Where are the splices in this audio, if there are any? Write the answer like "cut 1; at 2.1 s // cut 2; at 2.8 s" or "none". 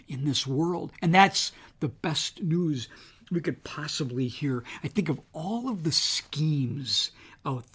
none